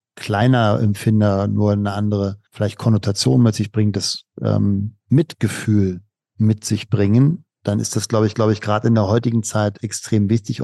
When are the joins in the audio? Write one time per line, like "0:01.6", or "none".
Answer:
0:02.5
0:05.0
0:08.3